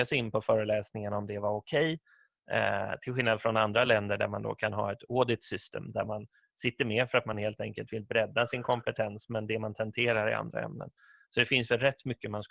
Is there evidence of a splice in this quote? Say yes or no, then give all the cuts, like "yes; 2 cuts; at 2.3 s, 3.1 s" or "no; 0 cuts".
no; 0 cuts